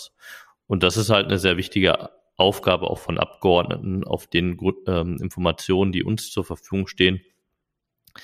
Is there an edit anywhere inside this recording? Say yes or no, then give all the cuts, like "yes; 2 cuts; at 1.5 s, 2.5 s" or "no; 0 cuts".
no; 0 cuts